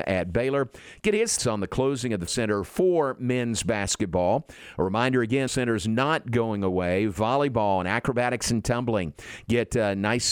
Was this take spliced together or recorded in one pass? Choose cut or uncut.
cut